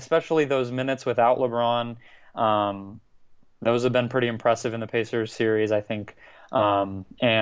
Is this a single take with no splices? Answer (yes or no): yes